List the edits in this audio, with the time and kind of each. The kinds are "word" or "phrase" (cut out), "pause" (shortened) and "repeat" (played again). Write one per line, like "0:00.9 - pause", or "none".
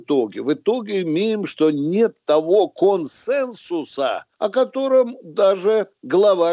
0:04.3 - pause